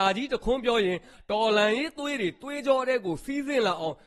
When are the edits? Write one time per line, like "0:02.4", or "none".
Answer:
none